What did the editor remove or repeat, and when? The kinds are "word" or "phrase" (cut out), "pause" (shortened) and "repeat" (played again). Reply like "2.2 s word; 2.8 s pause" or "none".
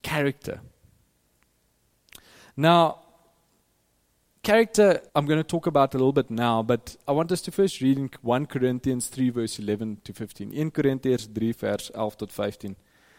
5.1 s pause